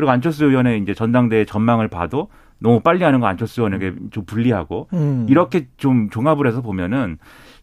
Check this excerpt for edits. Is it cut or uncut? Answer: uncut